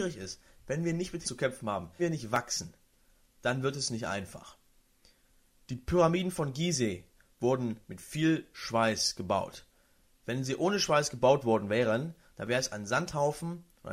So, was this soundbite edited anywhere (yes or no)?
yes